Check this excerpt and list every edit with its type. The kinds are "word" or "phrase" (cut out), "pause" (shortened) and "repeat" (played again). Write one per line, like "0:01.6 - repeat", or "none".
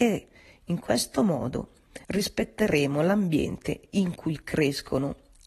0:02.0 - pause